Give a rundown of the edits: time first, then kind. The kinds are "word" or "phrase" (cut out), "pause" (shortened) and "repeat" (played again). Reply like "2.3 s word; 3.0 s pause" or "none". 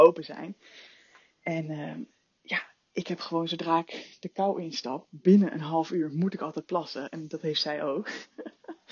none